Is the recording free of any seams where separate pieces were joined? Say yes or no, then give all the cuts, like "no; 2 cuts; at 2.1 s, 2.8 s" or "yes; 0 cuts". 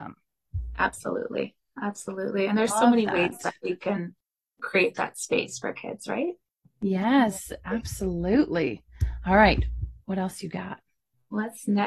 yes; 0 cuts